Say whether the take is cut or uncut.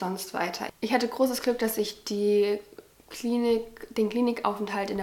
uncut